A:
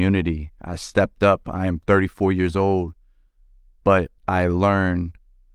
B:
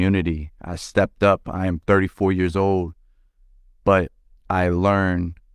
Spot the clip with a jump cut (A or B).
A